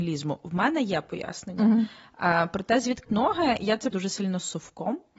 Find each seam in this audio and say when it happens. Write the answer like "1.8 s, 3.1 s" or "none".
3.1 s, 3.9 s